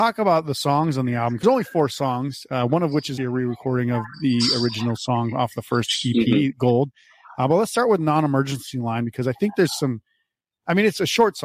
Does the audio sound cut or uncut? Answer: cut